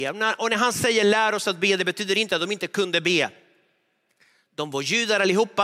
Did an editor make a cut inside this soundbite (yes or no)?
no